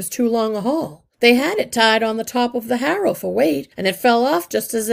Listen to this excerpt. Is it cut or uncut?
cut